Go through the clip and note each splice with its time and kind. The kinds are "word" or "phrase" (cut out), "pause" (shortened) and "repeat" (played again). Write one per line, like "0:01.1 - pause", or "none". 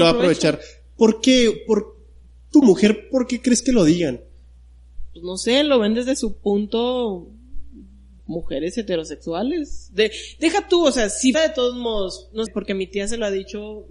0:02.6 - word
0:08.2 - word
0:11.3 - word
0:12.5 - word